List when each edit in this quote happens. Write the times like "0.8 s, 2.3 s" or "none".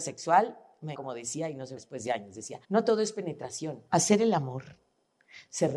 0.9 s, 1.8 s, 2.6 s, 3.9 s